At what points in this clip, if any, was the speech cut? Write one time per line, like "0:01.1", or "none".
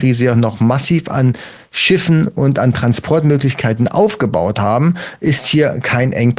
none